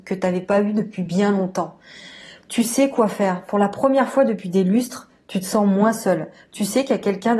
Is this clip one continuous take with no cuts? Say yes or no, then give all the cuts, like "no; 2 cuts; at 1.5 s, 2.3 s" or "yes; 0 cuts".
yes; 0 cuts